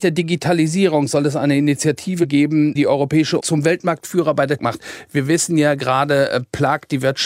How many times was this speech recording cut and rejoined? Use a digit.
3